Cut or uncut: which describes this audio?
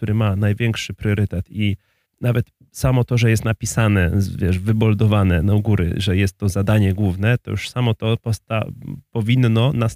cut